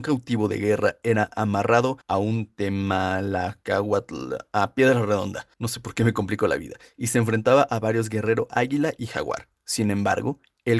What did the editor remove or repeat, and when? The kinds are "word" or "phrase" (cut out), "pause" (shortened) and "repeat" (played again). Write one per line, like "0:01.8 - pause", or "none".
0:02.0 - pause
0:05.5 - pause